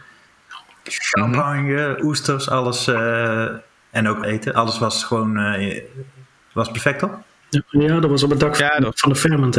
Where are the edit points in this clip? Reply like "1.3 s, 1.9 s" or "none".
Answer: 4.2 s